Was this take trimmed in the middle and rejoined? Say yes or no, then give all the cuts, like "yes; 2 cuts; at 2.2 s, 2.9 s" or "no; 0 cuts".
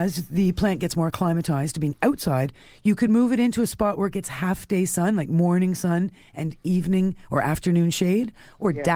no; 0 cuts